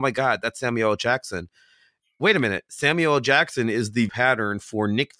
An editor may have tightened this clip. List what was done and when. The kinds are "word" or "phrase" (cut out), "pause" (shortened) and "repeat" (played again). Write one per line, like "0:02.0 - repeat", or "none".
0:04.1 - word